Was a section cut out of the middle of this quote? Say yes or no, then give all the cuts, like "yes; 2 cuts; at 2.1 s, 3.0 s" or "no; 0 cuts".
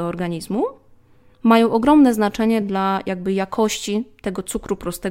no; 0 cuts